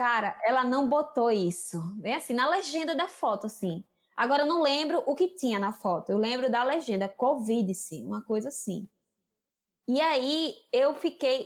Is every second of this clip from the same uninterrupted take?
yes; 0 cuts

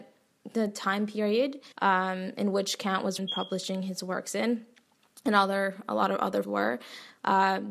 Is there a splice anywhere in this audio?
yes; 3 cuts; at 1.7 s, 3.2 s, 6.4 s

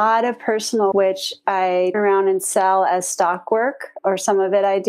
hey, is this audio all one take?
no; 2 cuts; at 0.9 s, 1.9 s

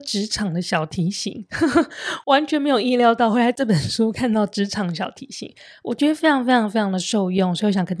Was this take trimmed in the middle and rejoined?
no; 0 cuts

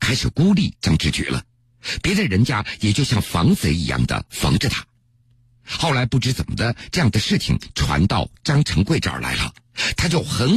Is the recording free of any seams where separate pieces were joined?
yes; 0 cuts

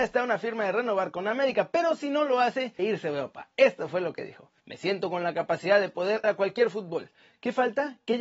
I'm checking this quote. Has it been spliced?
yes; 3 cuts; at 2.8 s, 4.6 s, 6.2 s

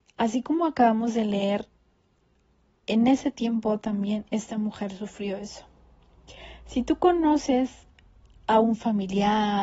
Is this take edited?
no; 0 cuts

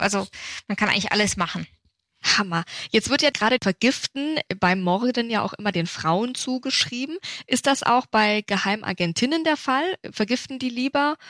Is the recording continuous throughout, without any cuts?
yes; 0 cuts

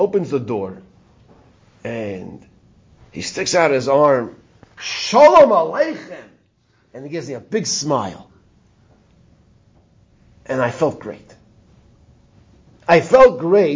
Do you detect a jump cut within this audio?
no; 0 cuts

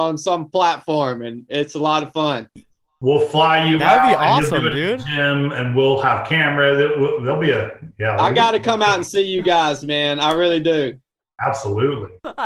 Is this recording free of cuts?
yes; 0 cuts

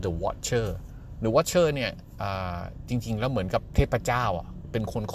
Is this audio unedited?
yes; 0 cuts

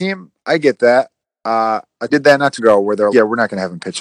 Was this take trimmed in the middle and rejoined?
yes; 3 cuts; at 2.1 s, 2.6 s, 3.1 s

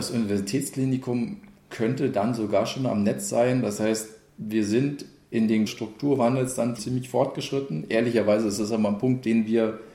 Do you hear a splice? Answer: yes; 2 cuts; at 5.7 s, 6.8 s

